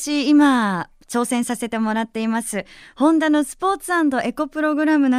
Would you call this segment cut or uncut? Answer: uncut